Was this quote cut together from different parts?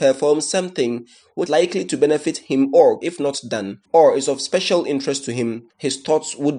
yes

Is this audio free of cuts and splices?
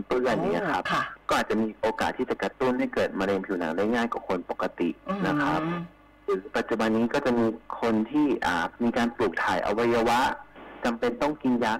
yes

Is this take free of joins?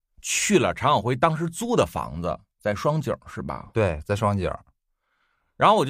yes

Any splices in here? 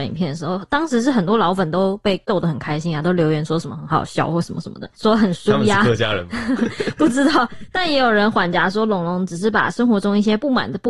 no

